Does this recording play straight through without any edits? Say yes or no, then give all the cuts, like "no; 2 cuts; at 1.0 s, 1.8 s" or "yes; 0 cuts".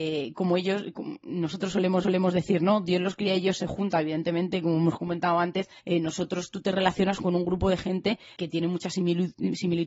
no; 3 cuts; at 2.0 s, 5.8 s, 8.4 s